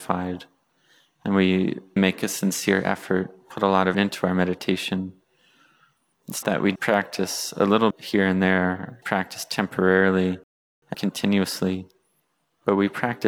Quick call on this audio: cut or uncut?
cut